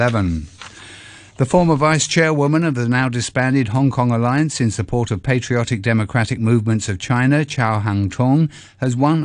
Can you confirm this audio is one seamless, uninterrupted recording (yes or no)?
yes